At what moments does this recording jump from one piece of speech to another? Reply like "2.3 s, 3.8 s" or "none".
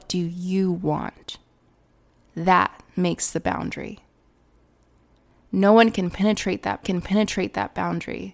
1.8 s, 6.8 s